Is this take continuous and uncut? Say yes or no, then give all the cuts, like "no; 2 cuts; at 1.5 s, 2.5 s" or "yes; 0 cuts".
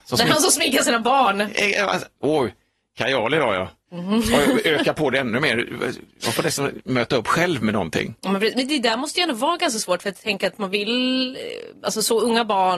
yes; 0 cuts